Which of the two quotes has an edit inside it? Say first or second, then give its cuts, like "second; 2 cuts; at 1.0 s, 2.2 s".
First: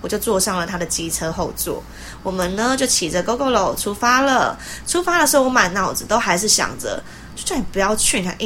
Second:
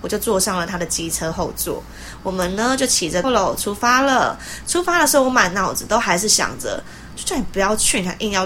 second; 1 cut; at 3.2 s